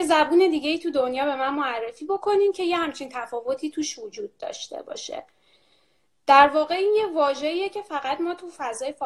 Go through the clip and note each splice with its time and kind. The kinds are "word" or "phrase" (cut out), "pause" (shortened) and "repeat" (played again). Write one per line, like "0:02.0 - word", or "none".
none